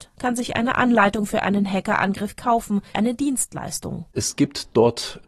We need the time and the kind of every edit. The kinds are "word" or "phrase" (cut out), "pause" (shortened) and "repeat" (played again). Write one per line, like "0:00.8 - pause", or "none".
0:02.9 - word